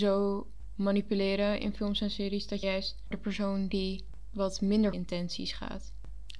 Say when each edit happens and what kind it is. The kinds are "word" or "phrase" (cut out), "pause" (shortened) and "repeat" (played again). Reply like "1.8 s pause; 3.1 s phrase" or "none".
2.6 s word; 3.1 s word; 4.9 s word